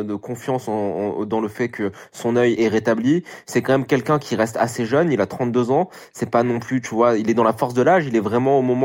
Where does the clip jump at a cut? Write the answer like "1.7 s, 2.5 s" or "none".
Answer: 2.6 s